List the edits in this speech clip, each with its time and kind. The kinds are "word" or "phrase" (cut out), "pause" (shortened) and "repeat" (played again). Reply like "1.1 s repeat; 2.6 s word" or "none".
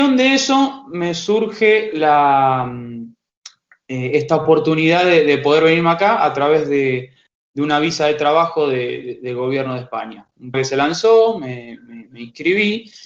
10.5 s word